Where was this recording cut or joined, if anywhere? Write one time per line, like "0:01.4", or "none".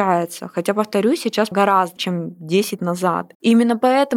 0:01.5
0:02.0
0:02.8